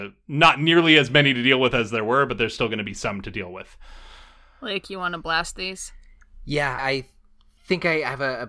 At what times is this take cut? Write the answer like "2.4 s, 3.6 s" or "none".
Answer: 6.8 s